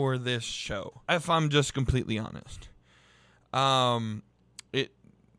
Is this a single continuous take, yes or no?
no